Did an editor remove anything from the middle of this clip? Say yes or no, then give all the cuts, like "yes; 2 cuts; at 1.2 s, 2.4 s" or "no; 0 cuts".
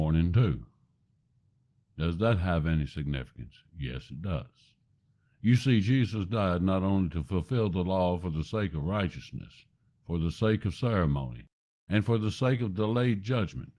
no; 0 cuts